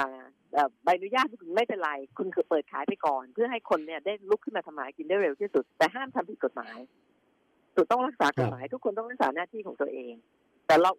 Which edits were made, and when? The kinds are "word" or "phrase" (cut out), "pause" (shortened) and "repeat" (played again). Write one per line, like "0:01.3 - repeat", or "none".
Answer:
0:05.7 - pause

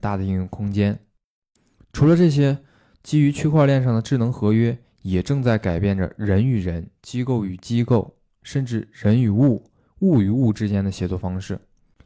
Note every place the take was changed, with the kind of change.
none

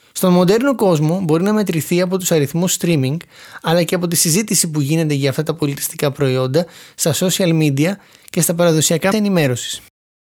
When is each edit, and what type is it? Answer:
0:09.1 - word

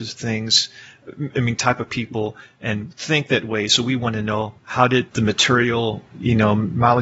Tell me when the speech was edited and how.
0:04.6 - pause
0:05.1 - pause
0:06.1 - pause

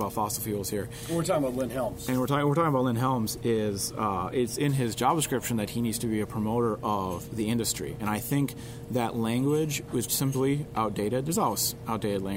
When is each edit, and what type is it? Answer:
0:10.1 - word

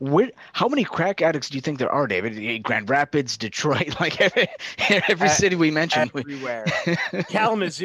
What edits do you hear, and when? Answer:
none

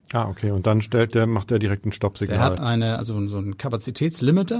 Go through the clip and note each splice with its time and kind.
0:02.6 - word

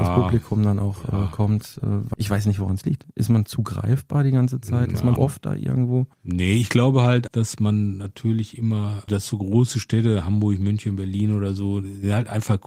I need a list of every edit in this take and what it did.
0:02.1 - word
0:05.2 - word
0:06.1 - pause
0:07.3 - word
0:09.1 - word

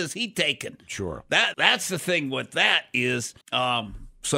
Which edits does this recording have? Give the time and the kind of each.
0:01.5 - word
0:03.4 - pause

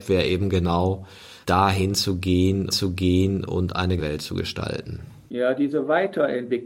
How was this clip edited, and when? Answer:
0:01.4 - pause
0:02.7 - repeat
0:04.0 - word

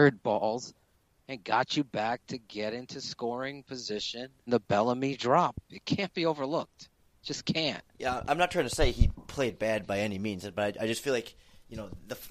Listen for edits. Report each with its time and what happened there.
0:04.5 - word
0:07.9 - pause

